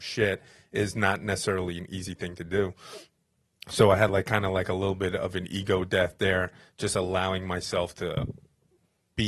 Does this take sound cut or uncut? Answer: uncut